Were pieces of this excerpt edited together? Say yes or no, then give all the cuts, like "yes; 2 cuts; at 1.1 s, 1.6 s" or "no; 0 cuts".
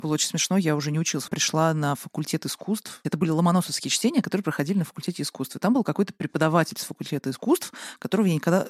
yes; 1 cut; at 1.3 s